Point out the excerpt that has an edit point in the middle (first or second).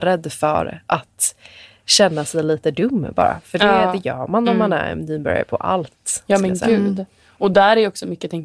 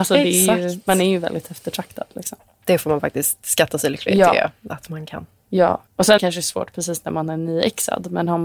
second